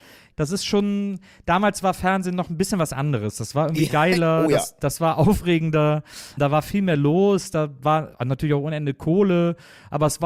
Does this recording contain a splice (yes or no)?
no